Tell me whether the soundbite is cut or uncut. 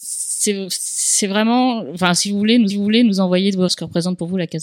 cut